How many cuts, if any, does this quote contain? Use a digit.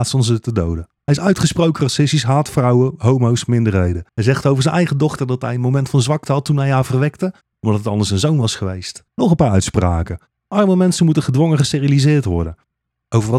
3